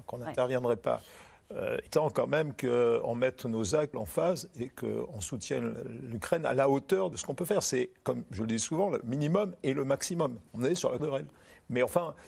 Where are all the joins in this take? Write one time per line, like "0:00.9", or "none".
0:01.9
0:03.9
0:07.1
0:10.5
0:11.0

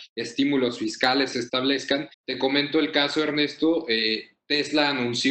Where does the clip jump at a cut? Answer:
0:01.3
0:02.1

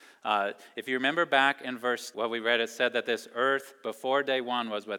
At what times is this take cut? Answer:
0:02.1

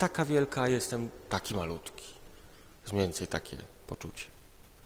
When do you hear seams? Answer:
none

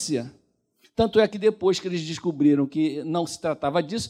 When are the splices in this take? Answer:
none

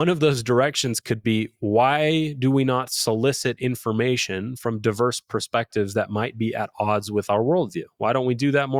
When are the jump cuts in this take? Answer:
none

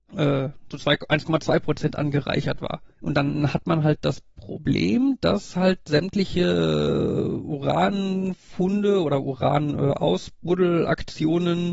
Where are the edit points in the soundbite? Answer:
0:02.9

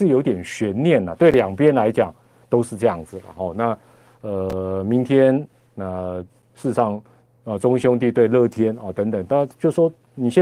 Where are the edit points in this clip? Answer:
none

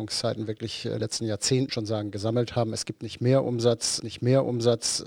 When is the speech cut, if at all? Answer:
0:01.0
0:01.7
0:04.0

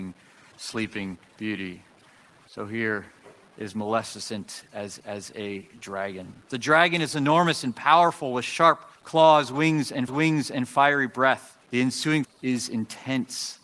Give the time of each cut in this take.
0:01.3
0:05.0
0:06.4
0:09.0
0:10.1
0:11.6
0:12.2

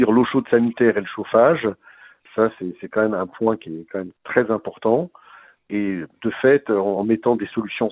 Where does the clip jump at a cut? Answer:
none

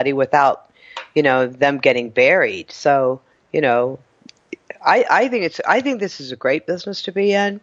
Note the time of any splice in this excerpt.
0:03.3

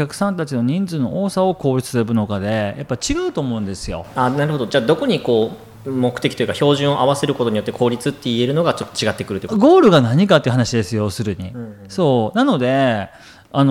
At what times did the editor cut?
0:05.7

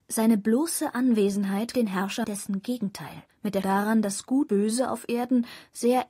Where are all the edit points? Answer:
0:01.7
0:02.2
0:03.3
0:03.6
0:04.5

